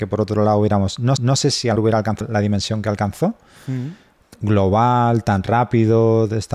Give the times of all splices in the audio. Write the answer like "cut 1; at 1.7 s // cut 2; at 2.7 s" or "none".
cut 1; at 1.2 s // cut 2; at 1.8 s // cut 3; at 2.2 s